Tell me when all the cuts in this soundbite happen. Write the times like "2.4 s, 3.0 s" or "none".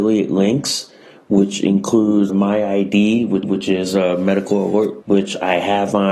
2.3 s, 3.4 s, 5.0 s